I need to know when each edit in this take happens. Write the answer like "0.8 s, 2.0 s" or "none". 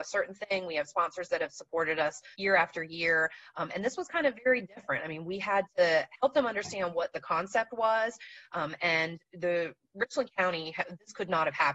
2.3 s

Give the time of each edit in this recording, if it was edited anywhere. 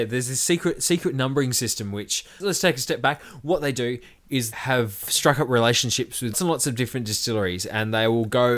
2.4 s, 4.5 s, 6.3 s

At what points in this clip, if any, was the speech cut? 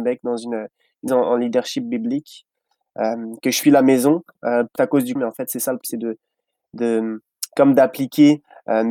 1.1 s, 3.6 s, 4.8 s, 5.2 s, 5.8 s

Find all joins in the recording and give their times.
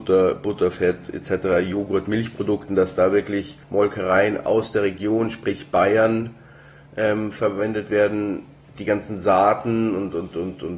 3.6 s

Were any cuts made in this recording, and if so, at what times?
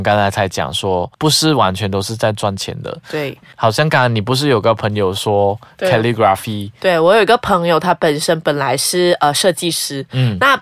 1.1 s

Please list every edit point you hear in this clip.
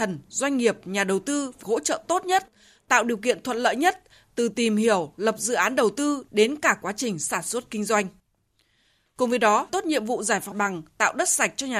1.6 s, 9.7 s, 10.5 s

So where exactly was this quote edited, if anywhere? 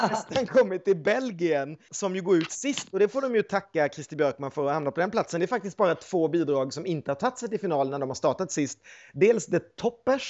none

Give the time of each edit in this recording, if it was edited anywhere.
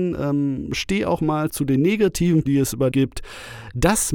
1.5 s, 2.5 s, 2.9 s

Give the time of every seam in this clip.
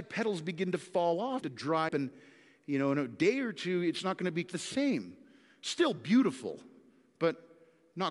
1.4 s, 1.9 s, 4.5 s

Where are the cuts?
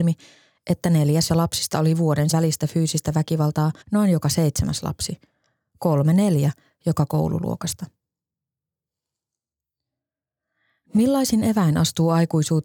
1.3 s, 2.3 s, 3.8 s

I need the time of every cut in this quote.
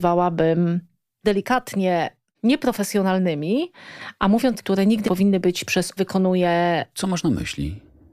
1.2 s, 4.6 s, 5.1 s, 5.7 s, 6.0 s

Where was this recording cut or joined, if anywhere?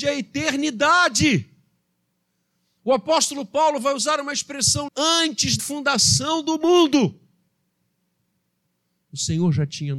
4.9 s, 5.6 s

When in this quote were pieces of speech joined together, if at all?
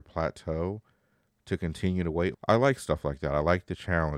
2.3 s

